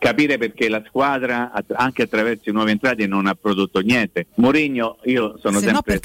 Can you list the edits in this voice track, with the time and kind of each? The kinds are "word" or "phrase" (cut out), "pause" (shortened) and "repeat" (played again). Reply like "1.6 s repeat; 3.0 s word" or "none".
4.3 s pause